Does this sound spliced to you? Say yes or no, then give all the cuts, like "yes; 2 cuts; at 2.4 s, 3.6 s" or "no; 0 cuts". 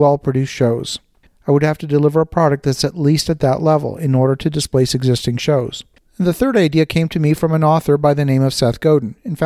no; 0 cuts